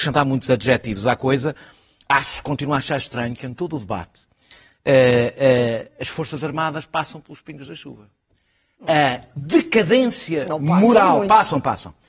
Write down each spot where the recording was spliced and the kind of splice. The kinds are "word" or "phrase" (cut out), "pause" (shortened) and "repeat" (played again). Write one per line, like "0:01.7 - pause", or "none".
none